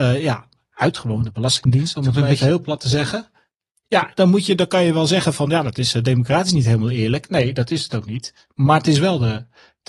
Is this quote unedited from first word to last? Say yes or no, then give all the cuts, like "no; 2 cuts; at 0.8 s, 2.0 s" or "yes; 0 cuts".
yes; 0 cuts